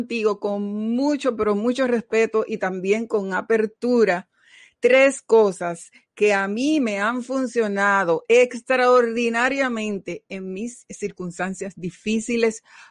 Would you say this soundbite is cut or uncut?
uncut